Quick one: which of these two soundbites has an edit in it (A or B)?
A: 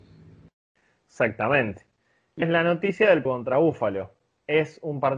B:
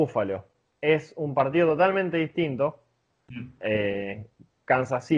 A